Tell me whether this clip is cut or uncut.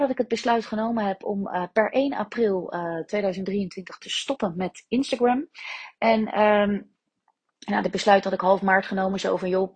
uncut